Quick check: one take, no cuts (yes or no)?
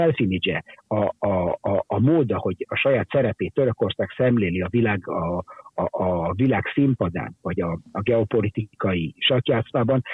yes